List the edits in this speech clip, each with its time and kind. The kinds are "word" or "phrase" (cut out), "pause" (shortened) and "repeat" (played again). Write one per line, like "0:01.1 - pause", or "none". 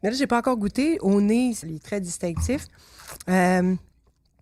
0:01.6 - word